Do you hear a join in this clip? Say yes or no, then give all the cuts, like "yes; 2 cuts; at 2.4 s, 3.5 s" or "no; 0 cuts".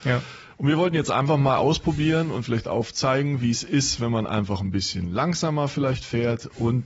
no; 0 cuts